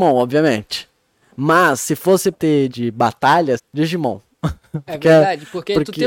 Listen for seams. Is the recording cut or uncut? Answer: cut